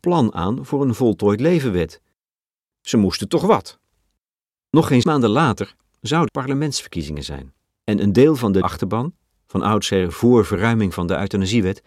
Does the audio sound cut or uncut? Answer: cut